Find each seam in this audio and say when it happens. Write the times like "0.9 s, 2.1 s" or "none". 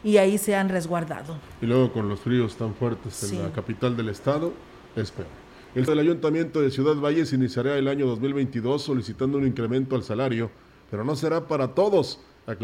5.9 s

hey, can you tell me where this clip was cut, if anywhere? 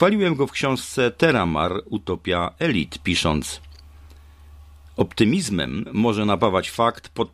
none

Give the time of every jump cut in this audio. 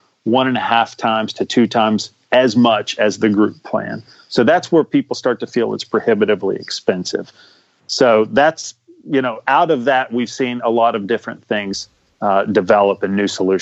none

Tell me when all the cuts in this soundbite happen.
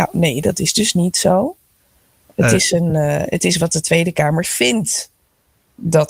none

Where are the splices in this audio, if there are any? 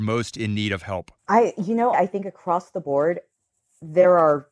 1.2 s, 1.9 s

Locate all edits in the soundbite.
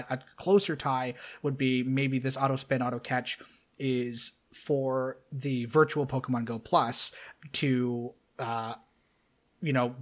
none

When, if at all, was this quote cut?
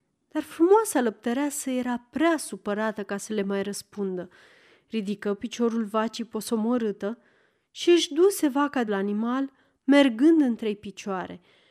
8.9 s

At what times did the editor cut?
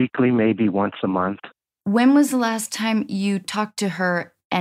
none

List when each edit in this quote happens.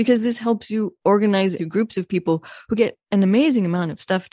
1.6 s

